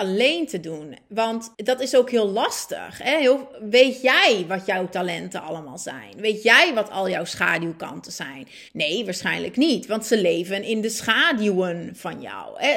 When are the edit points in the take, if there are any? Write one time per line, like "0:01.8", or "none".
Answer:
0:01.5
0:08.7